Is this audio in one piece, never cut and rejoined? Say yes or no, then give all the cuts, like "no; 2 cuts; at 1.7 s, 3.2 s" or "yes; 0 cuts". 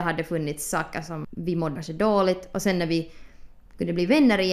no; 2 cuts; at 1.2 s, 1.8 s